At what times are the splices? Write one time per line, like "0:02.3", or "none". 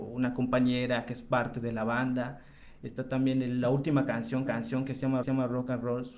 0:04.5
0:05.2